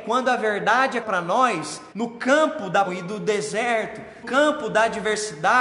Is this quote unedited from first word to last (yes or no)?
no